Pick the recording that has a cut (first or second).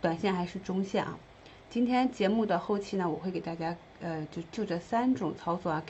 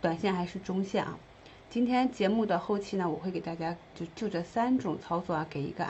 second